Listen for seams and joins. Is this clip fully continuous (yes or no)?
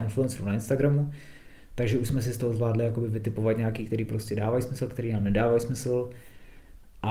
yes